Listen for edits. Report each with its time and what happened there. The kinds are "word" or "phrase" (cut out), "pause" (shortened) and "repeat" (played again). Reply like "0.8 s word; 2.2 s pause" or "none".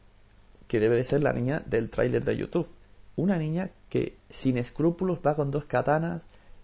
4.2 s pause